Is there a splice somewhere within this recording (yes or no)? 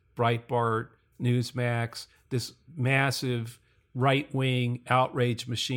no